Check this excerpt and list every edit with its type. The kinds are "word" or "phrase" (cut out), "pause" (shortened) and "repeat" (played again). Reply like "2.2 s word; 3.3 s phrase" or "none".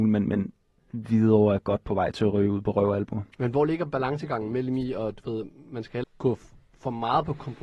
6.0 s word